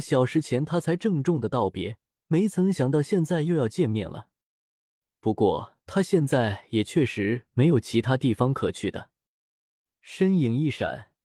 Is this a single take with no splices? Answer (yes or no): no